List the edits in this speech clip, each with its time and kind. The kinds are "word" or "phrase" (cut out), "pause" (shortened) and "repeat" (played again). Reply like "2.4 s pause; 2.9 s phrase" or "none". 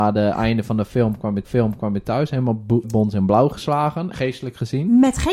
1.4 s repeat; 2.8 s word; 4.1 s word